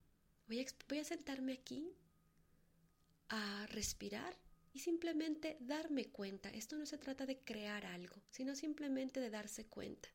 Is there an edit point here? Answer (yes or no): no